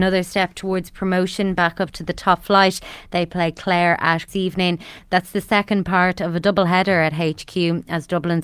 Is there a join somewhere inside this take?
yes; 1 cut; at 4.3 s

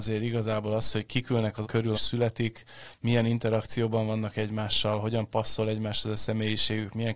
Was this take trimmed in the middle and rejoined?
yes; 2 cuts; at 1.6 s, 1.9 s

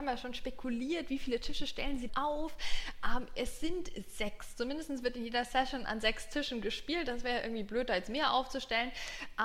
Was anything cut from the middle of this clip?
yes; 1 cut; at 2.1 s

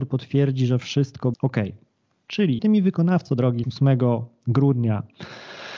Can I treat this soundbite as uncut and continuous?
no; 3 cuts; at 1.3 s, 2.6 s, 3.6 s

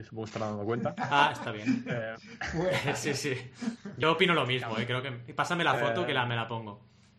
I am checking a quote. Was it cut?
yes; 1 cut; at 4.0 s

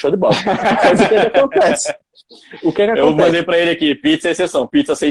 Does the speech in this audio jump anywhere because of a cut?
no; 0 cuts

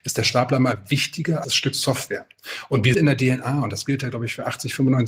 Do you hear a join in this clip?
yes; 2 cuts; at 1.4 s, 2.9 s

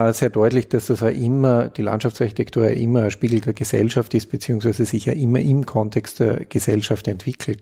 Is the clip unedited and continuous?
yes; 0 cuts

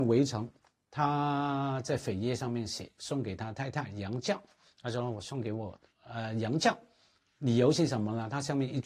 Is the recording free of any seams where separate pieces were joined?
yes; 0 cuts

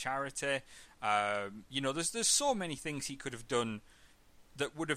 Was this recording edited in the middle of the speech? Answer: no; 0 cuts

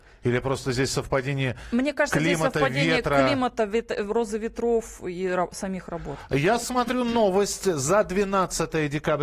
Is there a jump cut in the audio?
no; 0 cuts

